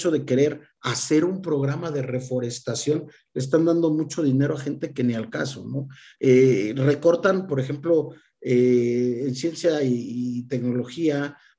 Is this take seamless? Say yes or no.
yes